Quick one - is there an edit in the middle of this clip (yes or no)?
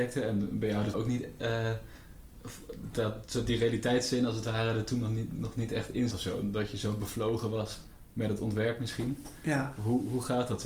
yes